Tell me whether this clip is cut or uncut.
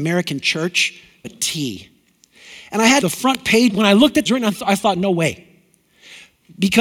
cut